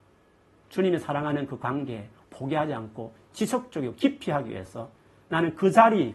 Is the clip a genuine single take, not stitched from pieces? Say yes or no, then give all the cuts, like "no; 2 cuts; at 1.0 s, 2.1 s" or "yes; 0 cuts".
yes; 0 cuts